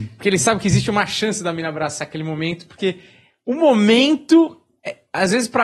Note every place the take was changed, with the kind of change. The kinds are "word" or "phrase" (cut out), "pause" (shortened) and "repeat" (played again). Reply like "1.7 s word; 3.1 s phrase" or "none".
none